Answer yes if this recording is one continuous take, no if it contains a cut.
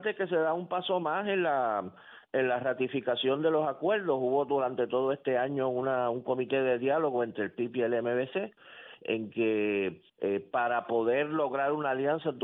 no